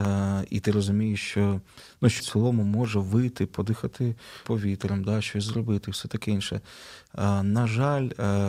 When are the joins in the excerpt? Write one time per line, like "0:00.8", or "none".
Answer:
0:02.2
0:04.5